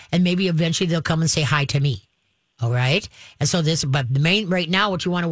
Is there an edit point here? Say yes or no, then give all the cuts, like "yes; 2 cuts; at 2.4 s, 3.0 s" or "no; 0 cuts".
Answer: no; 0 cuts